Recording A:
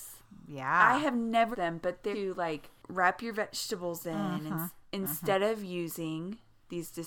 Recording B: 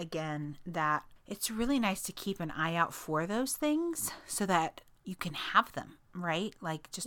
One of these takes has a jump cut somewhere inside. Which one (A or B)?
A